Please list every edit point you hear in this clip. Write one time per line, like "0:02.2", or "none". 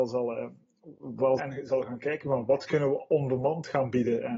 0:01.4